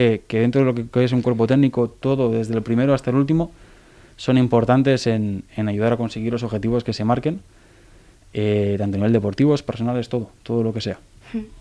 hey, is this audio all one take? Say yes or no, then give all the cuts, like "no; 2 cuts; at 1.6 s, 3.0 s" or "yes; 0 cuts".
yes; 0 cuts